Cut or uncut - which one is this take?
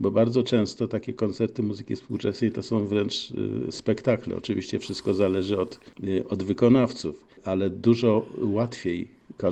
uncut